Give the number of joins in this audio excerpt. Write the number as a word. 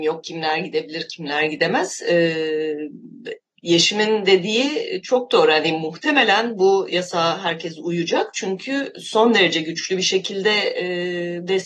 one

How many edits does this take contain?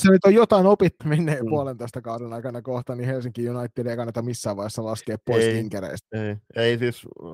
one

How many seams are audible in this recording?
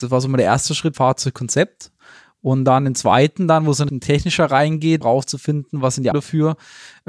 four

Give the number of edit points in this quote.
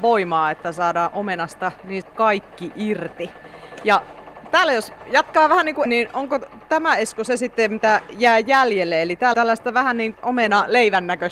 four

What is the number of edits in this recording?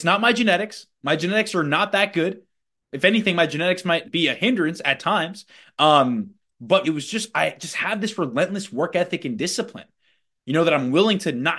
two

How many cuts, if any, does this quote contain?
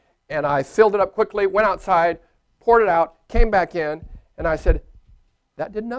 zero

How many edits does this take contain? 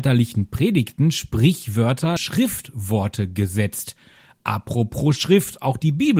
one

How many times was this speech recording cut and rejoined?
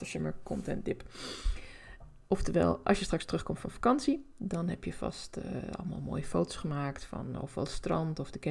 zero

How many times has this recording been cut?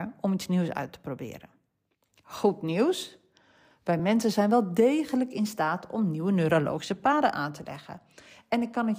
zero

